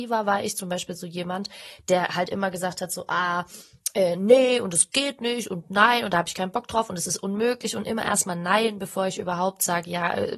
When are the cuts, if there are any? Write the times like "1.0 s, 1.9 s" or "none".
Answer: none